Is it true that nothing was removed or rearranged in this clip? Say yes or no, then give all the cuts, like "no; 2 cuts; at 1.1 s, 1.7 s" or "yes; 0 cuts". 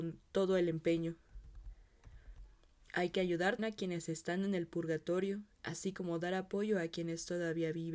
no; 1 cut; at 3.6 s